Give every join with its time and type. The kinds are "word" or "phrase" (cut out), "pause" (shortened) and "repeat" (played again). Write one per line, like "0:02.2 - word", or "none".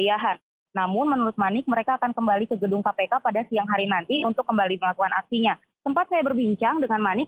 none